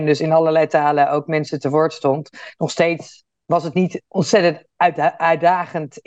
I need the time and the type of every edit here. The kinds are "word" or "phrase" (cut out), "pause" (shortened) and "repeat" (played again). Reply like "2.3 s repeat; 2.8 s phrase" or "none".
none